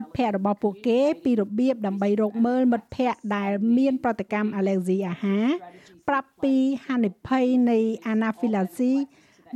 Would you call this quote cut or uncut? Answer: uncut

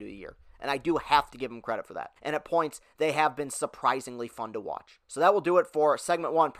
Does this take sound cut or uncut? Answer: cut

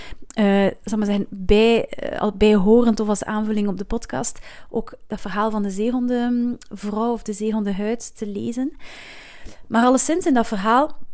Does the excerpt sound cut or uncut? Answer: uncut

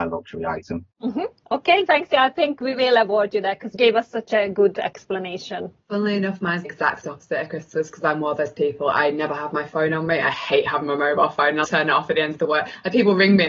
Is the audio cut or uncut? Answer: cut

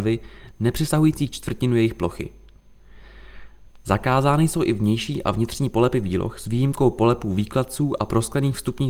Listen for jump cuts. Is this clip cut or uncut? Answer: uncut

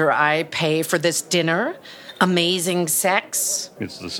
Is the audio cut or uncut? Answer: uncut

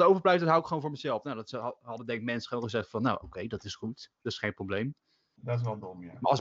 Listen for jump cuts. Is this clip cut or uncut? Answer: uncut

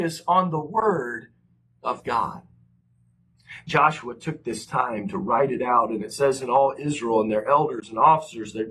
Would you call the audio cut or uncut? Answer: uncut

